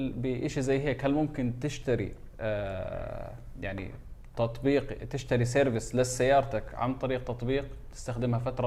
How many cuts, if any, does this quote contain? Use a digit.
0